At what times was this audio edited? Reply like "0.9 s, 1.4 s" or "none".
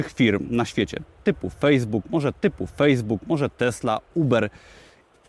2.3 s